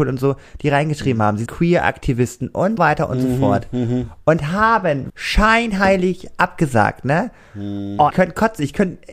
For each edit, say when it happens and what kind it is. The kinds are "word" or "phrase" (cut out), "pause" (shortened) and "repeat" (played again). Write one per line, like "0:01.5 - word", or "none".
0:01.5 - word
0:02.8 - word
0:05.1 - word
0:08.1 - word